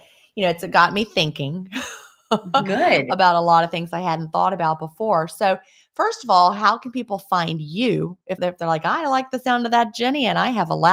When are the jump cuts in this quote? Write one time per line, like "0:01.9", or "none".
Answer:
none